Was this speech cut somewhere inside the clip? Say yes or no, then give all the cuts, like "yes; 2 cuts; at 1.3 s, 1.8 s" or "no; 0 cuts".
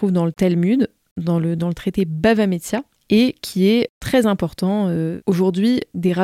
no; 0 cuts